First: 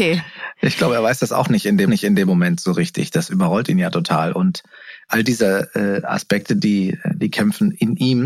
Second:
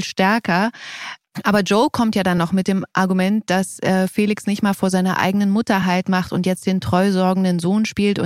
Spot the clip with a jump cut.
first; 2 cuts; at 1.9 s, 5.1 s

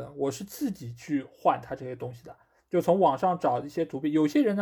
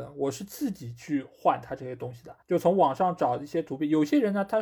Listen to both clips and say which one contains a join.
second; 1 cut; at 2.4 s

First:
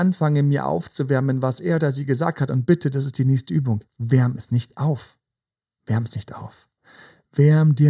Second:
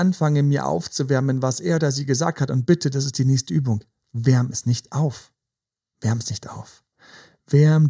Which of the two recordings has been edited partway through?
first; 1 cut; at 3.9 s

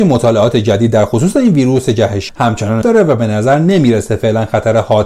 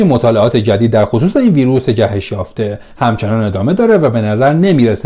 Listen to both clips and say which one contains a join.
first; 2 cuts; at 2.3 s, 2.8 s

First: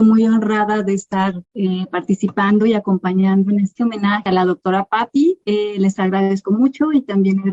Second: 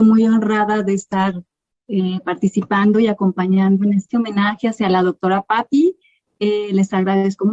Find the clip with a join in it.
first; 3 cuts; at 1.4 s, 4.3 s, 5.4 s

